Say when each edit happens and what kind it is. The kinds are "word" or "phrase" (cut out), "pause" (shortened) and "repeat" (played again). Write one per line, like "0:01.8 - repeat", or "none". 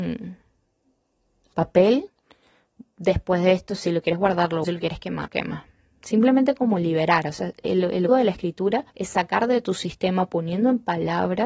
0:01.5 - word
0:04.6 - phrase
0:05.3 - word
0:07.6 - word
0:08.1 - word
0:08.9 - pause